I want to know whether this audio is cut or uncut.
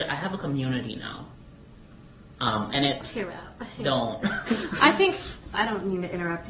cut